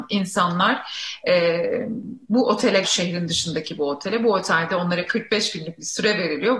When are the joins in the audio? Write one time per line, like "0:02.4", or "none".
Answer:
0:02.2
0:02.8